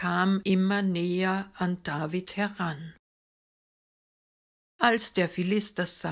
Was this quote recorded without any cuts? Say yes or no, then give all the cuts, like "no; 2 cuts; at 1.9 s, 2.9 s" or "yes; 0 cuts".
yes; 0 cuts